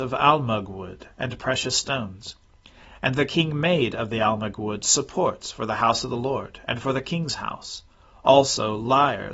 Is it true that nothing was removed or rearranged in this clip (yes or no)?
yes